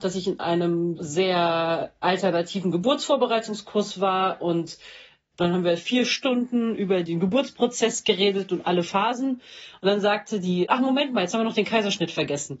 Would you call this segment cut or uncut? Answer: cut